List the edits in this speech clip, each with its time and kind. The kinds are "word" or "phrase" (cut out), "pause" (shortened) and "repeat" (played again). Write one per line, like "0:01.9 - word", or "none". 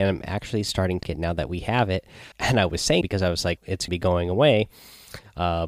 0:01.0 - word
0:02.3 - word
0:03.0 - word
0:03.6 - word
0:03.9 - word